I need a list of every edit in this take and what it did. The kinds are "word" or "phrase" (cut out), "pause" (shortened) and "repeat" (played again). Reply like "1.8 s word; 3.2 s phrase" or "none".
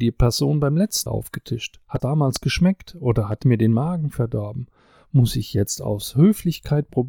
1.1 s word; 2.0 s word; 3.4 s word